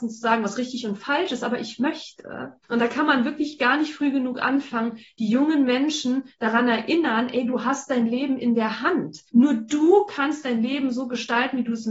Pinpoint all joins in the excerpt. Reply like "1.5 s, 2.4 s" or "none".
2.6 s, 9.3 s